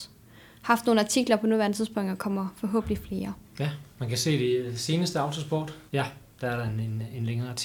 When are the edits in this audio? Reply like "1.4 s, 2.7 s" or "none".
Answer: 3.5 s, 5.9 s